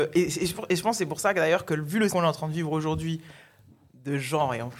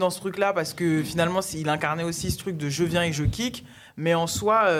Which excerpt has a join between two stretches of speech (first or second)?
first